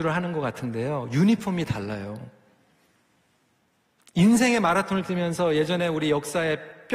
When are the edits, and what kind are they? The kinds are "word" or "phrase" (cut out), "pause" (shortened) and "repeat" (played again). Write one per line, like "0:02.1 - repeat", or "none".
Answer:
none